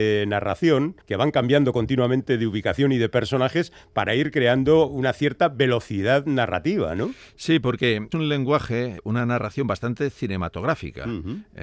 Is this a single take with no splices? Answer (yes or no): no